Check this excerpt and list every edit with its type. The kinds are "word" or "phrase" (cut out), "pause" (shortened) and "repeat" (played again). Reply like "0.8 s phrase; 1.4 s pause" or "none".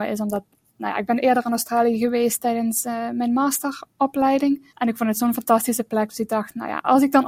4.7 s pause